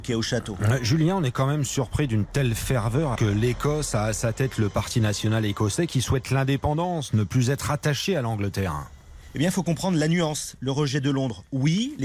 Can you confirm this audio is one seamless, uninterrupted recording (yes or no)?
no